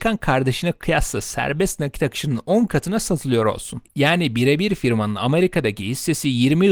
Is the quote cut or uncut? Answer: uncut